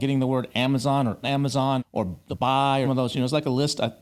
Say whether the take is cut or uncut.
cut